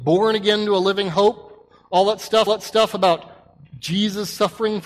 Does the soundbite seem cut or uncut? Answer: cut